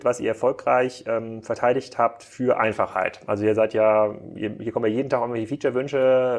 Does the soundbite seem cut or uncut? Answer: uncut